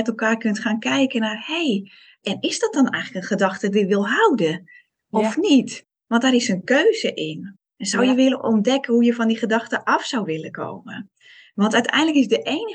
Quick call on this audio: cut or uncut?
uncut